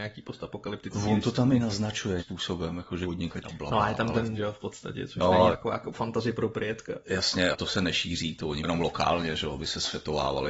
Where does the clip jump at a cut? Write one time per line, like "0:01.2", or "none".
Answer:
0:02.2
0:03.0
0:03.4
0:04.3
0:05.5
0:05.9
0:07.5
0:08.6